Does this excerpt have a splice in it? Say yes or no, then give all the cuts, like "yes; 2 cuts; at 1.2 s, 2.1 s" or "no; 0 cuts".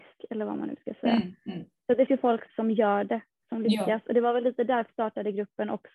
yes; 3 cuts; at 2.1 s, 2.5 s, 4.9 s